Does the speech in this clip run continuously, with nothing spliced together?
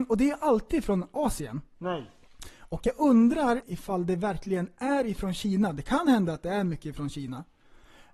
no; 1 cut; at 3.6 s

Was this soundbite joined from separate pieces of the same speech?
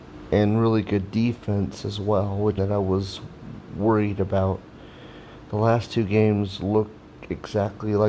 yes; 1 cut; at 2.6 s

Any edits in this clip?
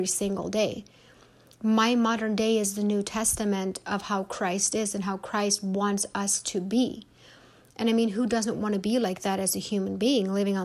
no; 0 cuts

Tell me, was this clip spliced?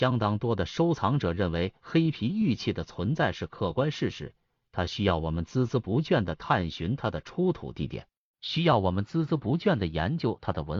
no; 0 cuts

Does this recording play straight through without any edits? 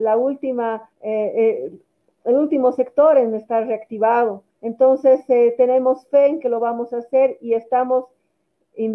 no; 2 cuts; at 0.9 s, 4.5 s

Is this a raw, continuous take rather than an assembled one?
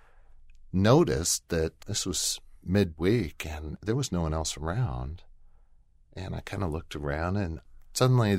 no; 1 cut; at 1.8 s

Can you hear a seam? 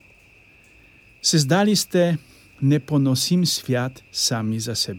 no; 0 cuts

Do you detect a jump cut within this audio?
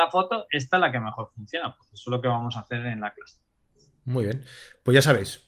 no; 0 cuts

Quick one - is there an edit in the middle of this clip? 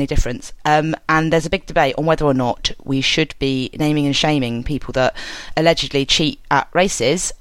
no; 0 cuts

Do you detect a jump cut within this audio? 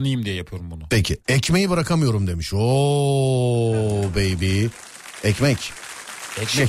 no; 0 cuts

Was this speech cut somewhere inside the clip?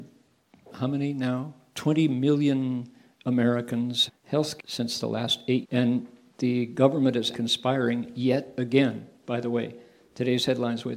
yes; 4 cuts; at 4.1 s, 4.6 s, 5.6 s, 7.3 s

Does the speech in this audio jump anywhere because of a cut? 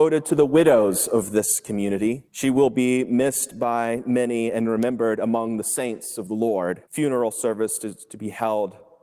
yes; 2 cuts; at 2.3 s, 6.8 s

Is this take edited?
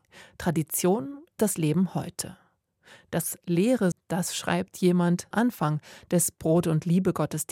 yes; 3 cuts; at 1.4 s, 3.9 s, 5.3 s

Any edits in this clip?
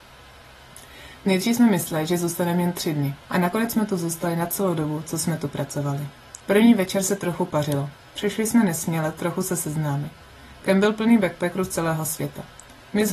yes; 2 cuts; at 3.2 s, 6.4 s

